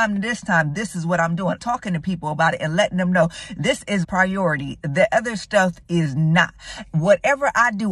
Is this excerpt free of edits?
no; 2 cuts; at 1.6 s, 4.0 s

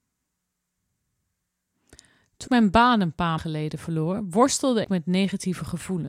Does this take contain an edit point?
yes; 3 cuts; at 2.5 s, 3.4 s, 4.8 s

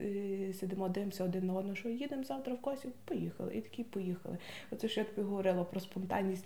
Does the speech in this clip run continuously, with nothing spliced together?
yes; 0 cuts

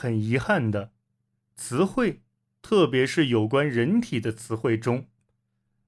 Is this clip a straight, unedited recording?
yes; 0 cuts

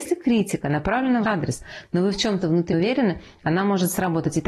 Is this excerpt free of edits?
no; 2 cuts; at 1.2 s, 2.7 s

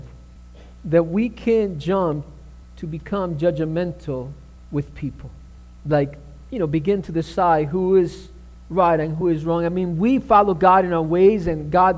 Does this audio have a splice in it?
no; 0 cuts

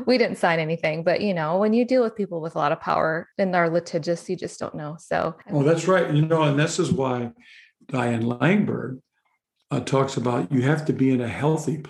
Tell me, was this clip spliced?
no; 0 cuts

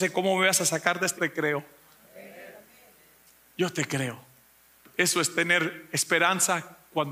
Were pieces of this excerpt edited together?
yes; 1 cut; at 1.2 s

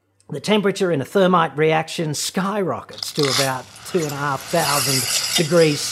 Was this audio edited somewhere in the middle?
no; 0 cuts

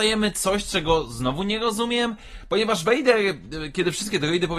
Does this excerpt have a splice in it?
no; 0 cuts

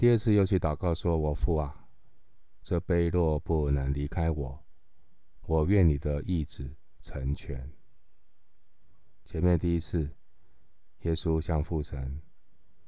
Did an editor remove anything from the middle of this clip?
yes; 1 cut; at 5.4 s

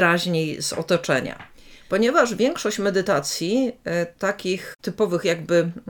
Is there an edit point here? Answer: no; 0 cuts

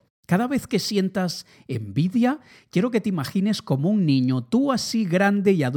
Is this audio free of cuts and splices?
yes; 0 cuts

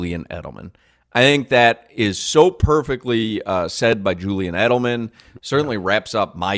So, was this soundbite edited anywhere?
no; 0 cuts

